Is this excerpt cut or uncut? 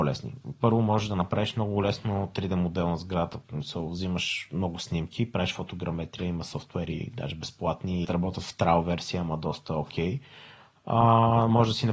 cut